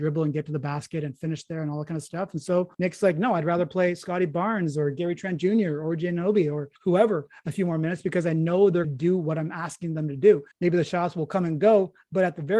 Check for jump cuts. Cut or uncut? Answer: cut